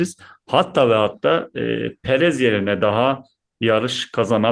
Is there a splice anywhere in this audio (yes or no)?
no